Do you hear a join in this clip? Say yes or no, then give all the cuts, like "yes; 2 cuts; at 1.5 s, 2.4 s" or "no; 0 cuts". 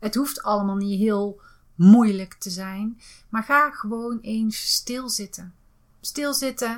no; 0 cuts